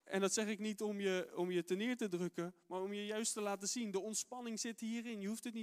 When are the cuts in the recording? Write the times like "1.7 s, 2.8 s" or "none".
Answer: none